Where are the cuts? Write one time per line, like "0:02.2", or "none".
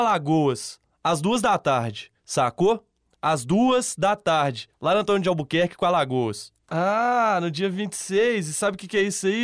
none